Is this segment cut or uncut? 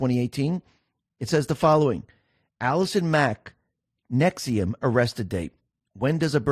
uncut